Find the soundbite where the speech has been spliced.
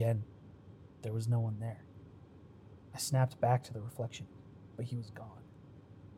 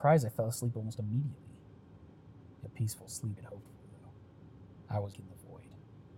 second; 3 cuts; at 2.6 s, 3.4 s, 5.1 s

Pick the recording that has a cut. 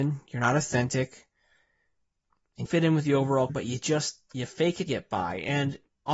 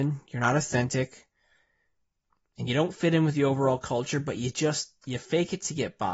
first; 3 cuts; at 2.7 s, 3.5 s, 4.9 s

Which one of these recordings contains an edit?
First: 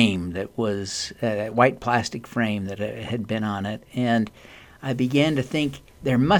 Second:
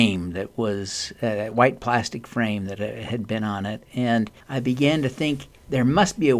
second; 1 cut; at 4.4 s

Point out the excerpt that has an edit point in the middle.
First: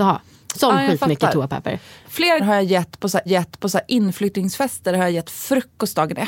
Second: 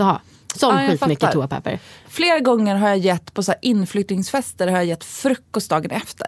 first; 2 cuts; at 2.4 s, 3.3 s

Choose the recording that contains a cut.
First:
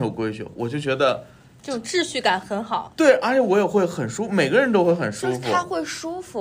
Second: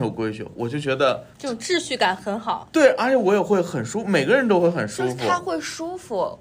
second; 1 cut; at 1.3 s

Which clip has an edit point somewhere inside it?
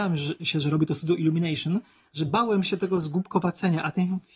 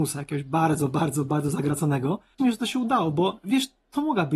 second; 2 cuts; at 1.3 s, 2.4 s

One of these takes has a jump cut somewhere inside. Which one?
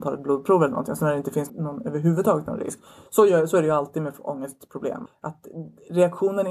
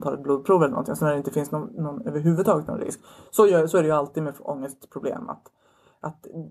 first; 2 cuts; at 1.5 s, 5.1 s

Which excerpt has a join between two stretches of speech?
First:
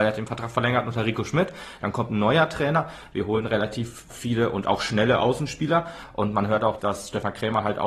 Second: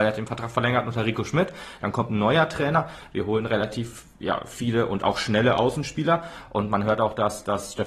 first; 2 cuts; at 4.1 s, 6.8 s

